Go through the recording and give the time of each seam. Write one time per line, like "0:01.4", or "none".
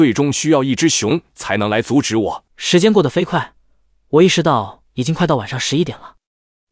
0:02.5